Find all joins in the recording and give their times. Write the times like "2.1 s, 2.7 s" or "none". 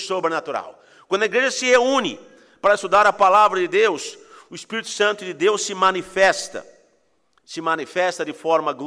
none